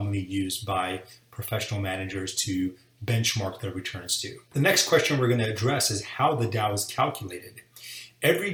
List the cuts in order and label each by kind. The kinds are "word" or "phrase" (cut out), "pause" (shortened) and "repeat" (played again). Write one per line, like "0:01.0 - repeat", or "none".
0:04.5 - pause